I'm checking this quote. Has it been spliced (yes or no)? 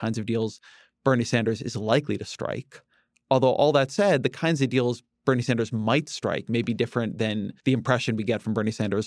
yes